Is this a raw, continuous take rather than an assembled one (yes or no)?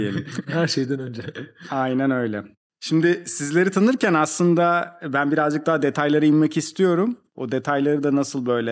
yes